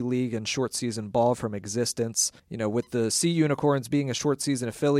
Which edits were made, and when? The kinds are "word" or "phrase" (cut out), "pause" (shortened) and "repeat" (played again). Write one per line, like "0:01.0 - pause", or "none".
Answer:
0:02.4 - pause